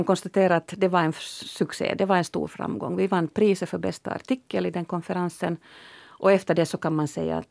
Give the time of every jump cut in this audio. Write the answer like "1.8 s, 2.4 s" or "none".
none